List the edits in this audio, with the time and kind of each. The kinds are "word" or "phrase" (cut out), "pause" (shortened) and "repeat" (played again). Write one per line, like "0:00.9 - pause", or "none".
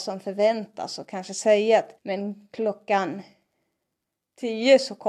0:02.0 - pause

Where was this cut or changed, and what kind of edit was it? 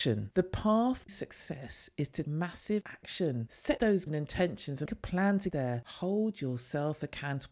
0:01.1 - word
0:02.2 - word
0:02.8 - word
0:04.1 - word
0:04.9 - word
0:05.5 - word

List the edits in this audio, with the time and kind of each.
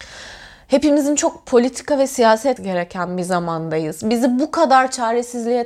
0:02.6 - word

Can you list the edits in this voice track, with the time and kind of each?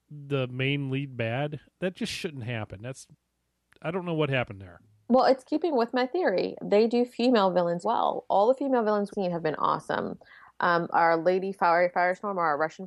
0:07.8 - word
0:09.1 - word

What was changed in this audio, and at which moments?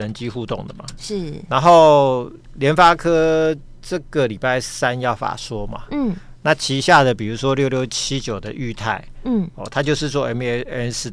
none

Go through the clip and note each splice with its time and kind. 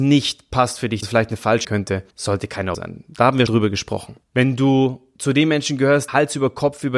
0:01.0 - word
0:01.6 - phrase
0:02.1 - pause
0:02.7 - word
0:03.5 - word
0:04.2 - pause
0:06.1 - word

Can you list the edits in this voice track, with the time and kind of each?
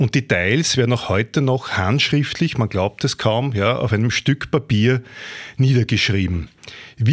none

